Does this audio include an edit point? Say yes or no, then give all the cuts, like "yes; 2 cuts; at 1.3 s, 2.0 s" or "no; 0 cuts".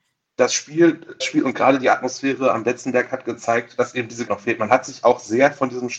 yes; 2 cuts; at 1.2 s, 4.3 s